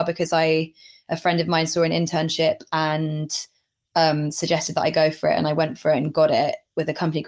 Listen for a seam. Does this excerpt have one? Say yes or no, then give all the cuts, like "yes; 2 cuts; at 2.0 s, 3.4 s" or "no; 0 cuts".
no; 0 cuts